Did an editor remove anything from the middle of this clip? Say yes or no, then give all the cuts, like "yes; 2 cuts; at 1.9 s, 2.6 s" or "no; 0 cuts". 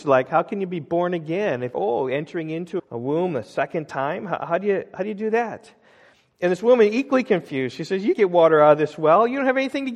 yes; 3 cuts; at 1.7 s, 2.8 s, 8.1 s